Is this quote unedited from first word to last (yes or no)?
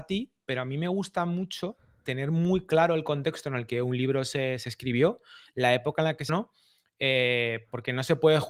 no